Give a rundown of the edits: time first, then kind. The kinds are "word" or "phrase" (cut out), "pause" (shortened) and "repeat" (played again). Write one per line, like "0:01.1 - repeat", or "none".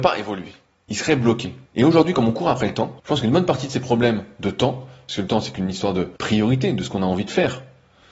0:01.7 - pause
0:03.0 - pause
0:06.2 - pause

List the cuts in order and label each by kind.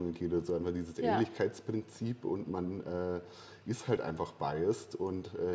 none

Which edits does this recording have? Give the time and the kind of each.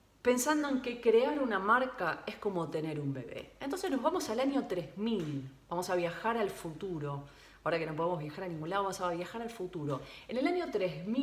none

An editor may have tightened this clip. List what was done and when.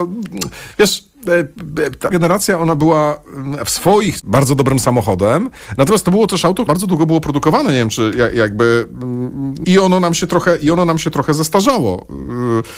0:02.1 - word
0:04.2 - word
0:06.7 - word
0:09.6 - word

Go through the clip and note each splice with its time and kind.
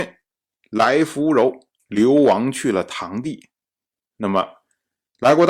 none

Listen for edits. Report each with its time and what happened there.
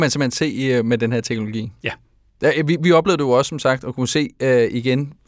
none

